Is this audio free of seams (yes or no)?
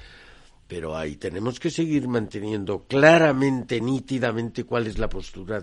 yes